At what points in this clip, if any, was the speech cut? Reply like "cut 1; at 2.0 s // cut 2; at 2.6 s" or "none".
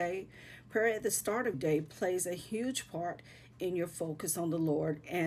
cut 1; at 1.5 s